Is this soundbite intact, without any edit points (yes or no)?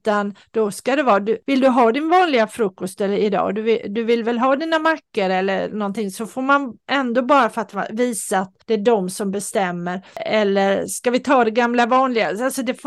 no